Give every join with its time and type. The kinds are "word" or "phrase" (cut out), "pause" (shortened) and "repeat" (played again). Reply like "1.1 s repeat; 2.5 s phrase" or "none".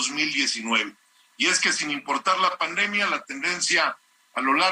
none

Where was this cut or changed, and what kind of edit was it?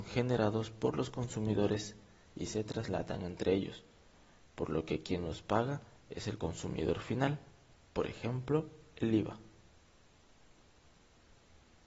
none

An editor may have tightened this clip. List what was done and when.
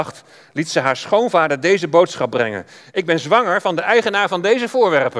none

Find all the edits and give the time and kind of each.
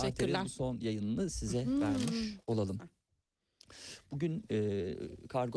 none

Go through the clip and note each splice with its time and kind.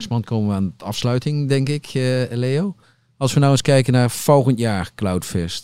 none

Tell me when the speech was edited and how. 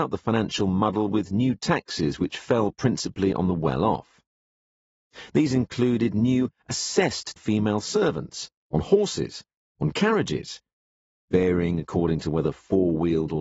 7.4 s phrase

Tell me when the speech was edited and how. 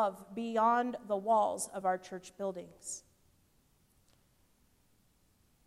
none

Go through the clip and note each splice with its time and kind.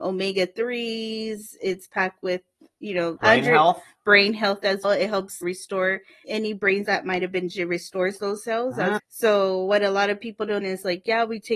3.2 s word; 4.8 s word; 5.4 s word; 6.2 s word; 6.8 s word; 7.5 s word; 9.0 s word; 10.6 s word

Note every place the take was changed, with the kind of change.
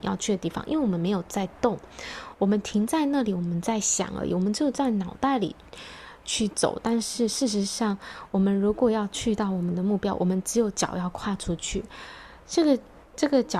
none

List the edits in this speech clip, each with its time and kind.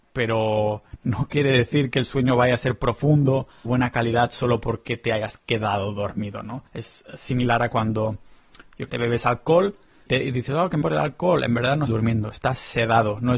3.7 s phrase; 6.7 s pause; 8.9 s word; 10.1 s word; 10.8 s word; 11.9 s word

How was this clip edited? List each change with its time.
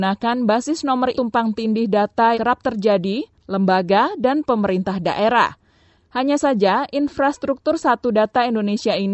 1.1 s phrase; 2.3 s word; 3.4 s phrase

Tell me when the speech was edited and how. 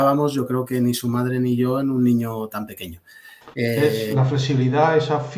3.5 s pause

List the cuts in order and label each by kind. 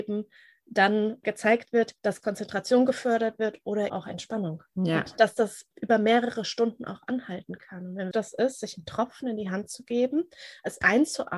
1.2 s word; 2.0 s pause; 3.9 s word; 4.7 s pause; 5.7 s pause; 8.1 s phrase

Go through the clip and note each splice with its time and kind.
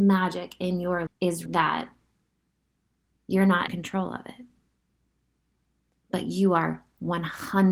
1.1 s word; 1.5 s word; 3.7 s word

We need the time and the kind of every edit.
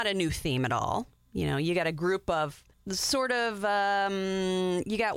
2.7 s pause

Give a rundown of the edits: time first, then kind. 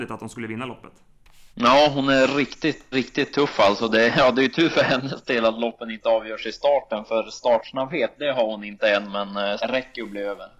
1.5 s pause; 2.9 s word; 8.2 s word; 9.6 s phrase

